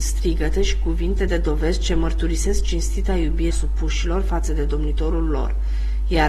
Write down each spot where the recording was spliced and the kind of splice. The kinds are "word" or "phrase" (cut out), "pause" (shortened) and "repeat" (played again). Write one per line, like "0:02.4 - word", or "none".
0:01.3 - phrase
0:03.5 - word